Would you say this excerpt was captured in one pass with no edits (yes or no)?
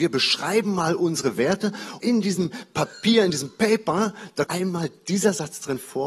no